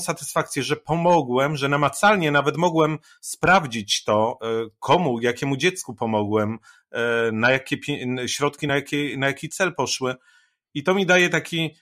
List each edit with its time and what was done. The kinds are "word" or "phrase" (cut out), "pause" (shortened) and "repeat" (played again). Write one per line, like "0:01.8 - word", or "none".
none